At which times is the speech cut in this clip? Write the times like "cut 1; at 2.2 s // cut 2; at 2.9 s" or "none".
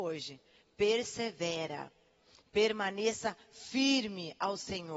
none